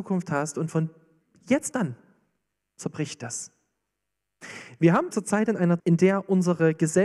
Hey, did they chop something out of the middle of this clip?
yes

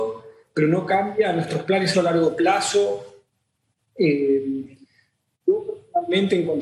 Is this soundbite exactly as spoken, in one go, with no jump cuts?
no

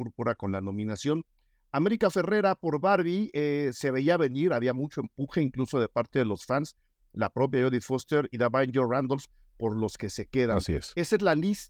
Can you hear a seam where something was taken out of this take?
no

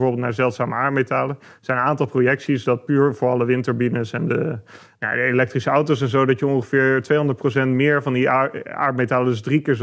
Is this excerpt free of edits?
yes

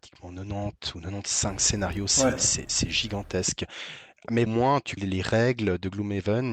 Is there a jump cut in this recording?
yes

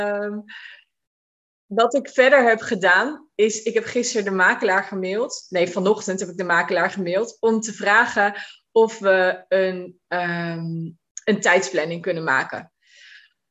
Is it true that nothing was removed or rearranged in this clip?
yes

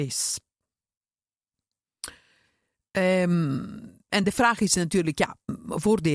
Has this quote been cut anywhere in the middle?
no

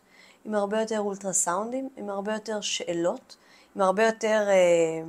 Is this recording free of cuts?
yes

